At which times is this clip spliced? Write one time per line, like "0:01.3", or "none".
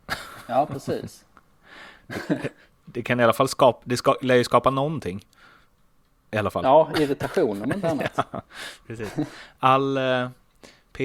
none